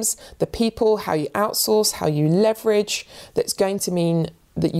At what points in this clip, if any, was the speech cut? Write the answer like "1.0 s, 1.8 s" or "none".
none